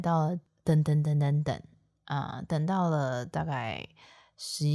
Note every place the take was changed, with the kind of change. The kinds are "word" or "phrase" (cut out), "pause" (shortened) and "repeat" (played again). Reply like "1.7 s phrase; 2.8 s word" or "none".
none